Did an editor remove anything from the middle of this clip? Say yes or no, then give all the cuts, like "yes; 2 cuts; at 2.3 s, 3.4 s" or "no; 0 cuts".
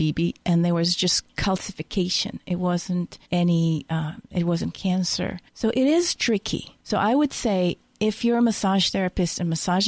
yes; 3 cuts; at 3.2 s, 5.5 s, 6.8 s